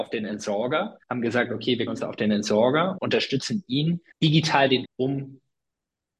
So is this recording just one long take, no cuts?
no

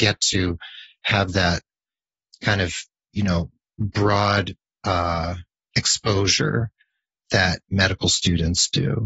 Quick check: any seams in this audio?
no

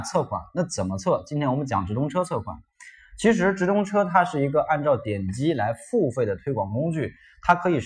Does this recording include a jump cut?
no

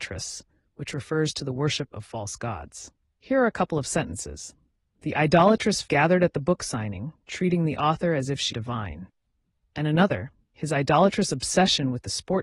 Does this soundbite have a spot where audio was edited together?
yes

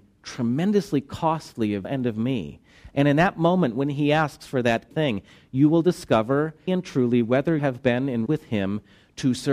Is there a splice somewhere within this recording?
yes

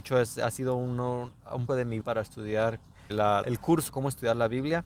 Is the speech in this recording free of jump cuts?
no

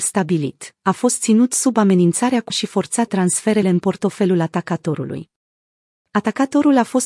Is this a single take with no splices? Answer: no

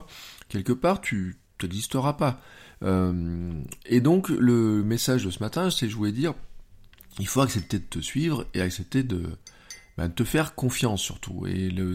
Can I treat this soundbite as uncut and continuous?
yes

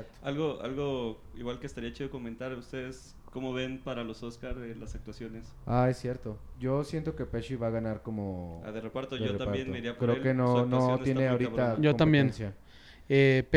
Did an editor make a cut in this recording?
no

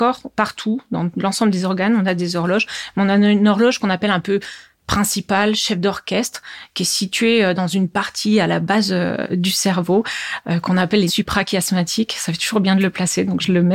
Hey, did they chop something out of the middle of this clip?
yes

